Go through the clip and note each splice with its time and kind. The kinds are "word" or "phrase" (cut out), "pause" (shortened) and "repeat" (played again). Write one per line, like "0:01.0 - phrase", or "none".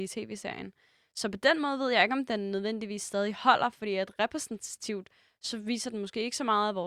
none